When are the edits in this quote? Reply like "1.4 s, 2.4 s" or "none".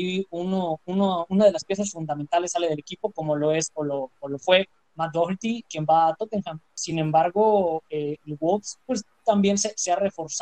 none